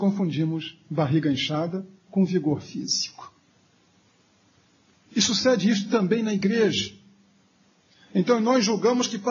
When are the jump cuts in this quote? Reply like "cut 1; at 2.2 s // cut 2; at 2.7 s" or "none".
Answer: none